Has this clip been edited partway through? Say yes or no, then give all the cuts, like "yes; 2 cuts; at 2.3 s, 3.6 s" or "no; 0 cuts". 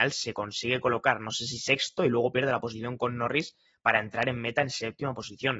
no; 0 cuts